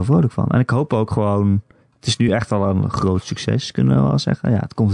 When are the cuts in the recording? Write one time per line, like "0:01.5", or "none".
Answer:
none